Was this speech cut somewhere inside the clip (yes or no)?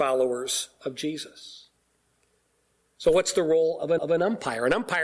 yes